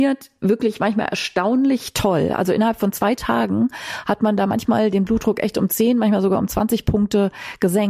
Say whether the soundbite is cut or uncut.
uncut